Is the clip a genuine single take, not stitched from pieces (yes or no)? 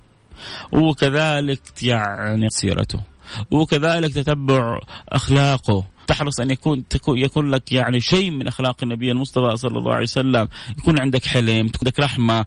no